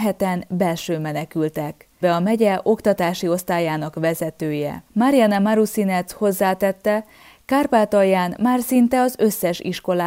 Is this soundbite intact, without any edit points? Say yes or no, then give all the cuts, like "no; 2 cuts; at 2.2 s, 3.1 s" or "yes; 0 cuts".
no; 2 cuts; at 2.0 s, 4.9 s